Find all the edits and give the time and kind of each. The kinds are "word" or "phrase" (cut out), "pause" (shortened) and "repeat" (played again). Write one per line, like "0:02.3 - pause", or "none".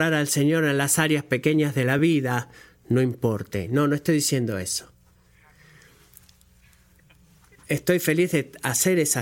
none